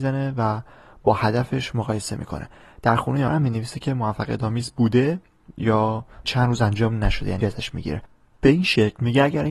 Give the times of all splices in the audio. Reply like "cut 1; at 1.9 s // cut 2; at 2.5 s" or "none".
cut 1; at 3.3 s // cut 2; at 6.2 s // cut 3; at 7.4 s